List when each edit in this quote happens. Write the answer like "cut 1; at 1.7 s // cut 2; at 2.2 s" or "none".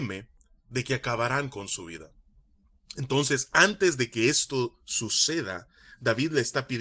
none